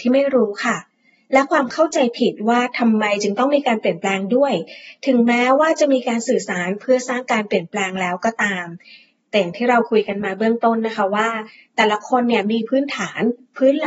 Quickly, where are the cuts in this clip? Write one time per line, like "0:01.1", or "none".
none